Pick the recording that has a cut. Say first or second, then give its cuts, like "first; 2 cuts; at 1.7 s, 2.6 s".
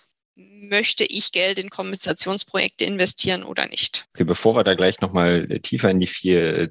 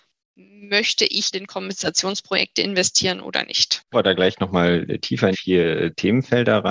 second; 3 cuts; at 1.3 s, 3.9 s, 5.3 s